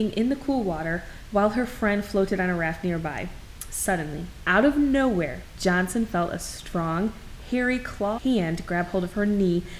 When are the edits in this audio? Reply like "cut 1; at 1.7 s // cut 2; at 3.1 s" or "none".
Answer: cut 1; at 8.2 s